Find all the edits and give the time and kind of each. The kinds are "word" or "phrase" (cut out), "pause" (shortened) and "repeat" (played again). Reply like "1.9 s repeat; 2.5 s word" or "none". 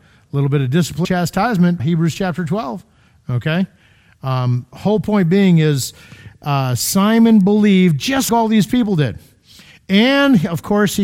1.0 s word; 1.8 s word; 8.3 s word